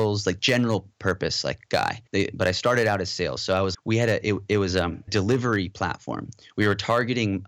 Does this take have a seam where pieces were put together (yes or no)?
yes